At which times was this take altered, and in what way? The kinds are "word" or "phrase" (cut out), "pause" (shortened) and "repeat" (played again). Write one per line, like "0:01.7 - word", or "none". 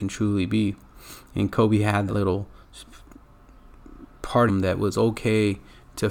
0:02.1 - word
0:04.5 - word